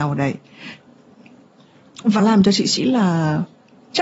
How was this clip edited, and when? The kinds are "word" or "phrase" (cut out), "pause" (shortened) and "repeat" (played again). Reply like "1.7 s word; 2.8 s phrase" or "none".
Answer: 2.2 s word; 2.8 s word